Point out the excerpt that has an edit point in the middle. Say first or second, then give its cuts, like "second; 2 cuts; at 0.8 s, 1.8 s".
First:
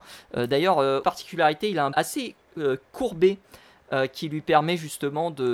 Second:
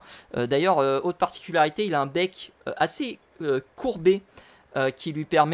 first; 2 cuts; at 1.0 s, 1.9 s